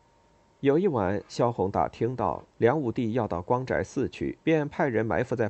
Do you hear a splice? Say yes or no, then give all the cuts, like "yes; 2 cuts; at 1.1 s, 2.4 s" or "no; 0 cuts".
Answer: yes; 2 cuts; at 2.5 s, 4.4 s